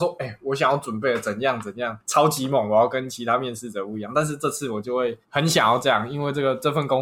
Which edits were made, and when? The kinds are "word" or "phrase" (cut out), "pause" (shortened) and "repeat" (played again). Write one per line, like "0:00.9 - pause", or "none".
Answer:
0:05.2 - pause